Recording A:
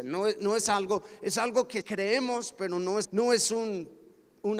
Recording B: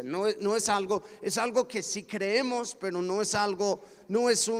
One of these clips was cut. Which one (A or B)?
A